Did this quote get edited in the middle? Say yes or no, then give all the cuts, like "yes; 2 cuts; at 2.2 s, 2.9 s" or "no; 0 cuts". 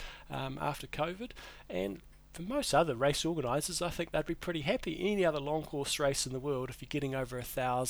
no; 0 cuts